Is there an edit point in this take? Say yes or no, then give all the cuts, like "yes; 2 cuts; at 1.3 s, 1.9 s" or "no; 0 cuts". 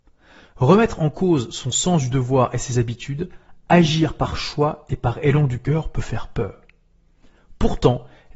no; 0 cuts